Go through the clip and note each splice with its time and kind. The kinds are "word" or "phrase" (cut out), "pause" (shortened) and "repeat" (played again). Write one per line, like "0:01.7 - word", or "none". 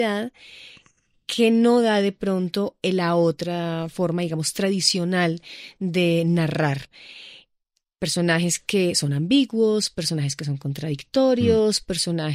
none